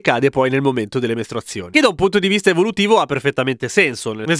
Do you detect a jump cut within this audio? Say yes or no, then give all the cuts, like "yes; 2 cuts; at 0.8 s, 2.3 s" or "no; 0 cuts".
no; 0 cuts